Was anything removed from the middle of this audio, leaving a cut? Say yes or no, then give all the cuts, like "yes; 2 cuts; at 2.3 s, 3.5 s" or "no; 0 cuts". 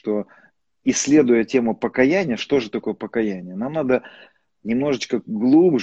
no; 0 cuts